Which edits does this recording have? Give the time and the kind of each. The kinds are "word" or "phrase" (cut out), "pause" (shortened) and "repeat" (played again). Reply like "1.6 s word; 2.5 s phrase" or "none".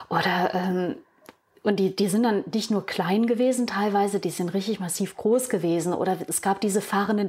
none